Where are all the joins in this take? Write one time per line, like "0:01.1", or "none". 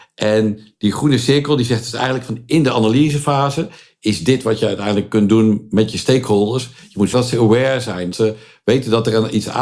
0:07.1
0:08.1

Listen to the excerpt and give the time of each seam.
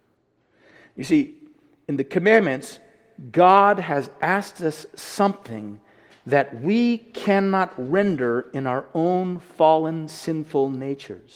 none

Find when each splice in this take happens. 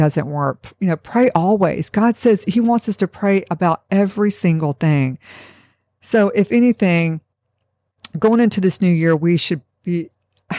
none

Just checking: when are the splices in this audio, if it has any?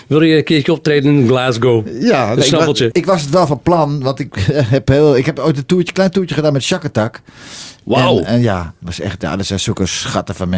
none

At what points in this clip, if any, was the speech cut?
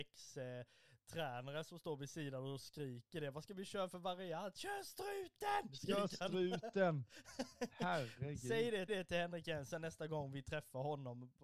0:08.9

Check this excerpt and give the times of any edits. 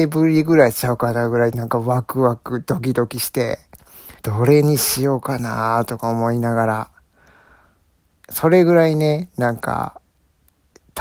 0:04.2

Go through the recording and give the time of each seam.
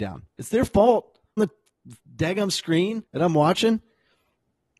0:01.4
0:03.1

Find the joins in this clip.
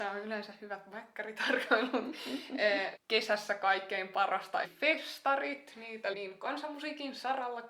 0:03.0
0:04.6
0:06.1

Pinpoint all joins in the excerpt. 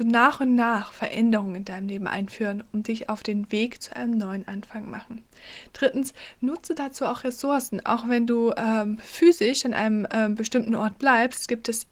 none

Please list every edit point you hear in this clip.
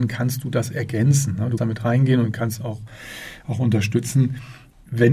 0:01.6

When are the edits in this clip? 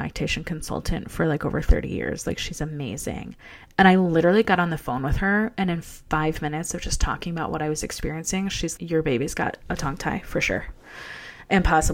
0:08.8

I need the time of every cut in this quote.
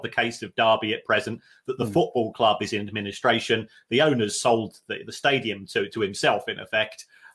none

